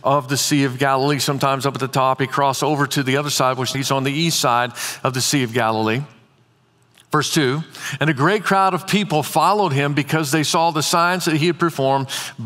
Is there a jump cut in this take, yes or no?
yes